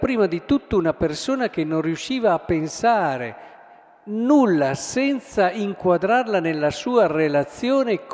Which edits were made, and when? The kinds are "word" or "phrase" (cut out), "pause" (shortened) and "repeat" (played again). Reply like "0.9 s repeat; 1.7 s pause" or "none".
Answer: none